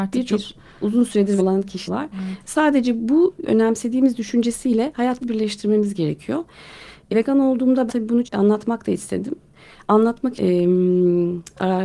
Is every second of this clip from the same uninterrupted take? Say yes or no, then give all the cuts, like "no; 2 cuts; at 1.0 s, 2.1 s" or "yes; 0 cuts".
no; 8 cuts; at 1.4 s, 1.9 s, 3.5 s, 5.2 s, 7.1 s, 7.9 s, 8.2 s, 10.4 s